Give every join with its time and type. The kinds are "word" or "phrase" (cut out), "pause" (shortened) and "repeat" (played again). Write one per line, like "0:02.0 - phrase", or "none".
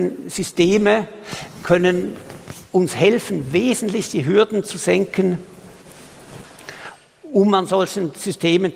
none